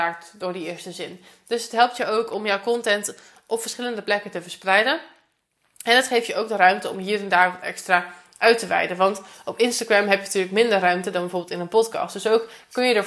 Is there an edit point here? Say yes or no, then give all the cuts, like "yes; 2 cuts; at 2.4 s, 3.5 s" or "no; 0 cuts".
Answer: no; 0 cuts